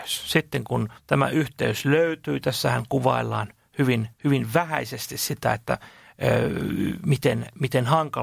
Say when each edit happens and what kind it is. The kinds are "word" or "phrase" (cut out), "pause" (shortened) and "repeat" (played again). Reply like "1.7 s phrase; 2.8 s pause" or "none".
1.0 s pause; 4.1 s pause